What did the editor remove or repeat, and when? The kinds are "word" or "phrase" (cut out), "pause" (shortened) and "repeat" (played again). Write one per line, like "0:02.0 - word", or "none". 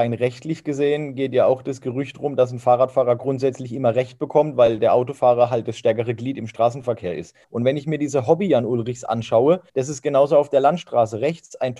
0:07.4 - pause
0:09.7 - pause